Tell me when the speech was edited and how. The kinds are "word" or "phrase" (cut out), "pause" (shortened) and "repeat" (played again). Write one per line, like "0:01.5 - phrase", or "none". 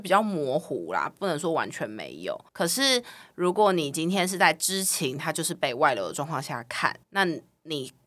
0:02.5 - pause
0:07.0 - pause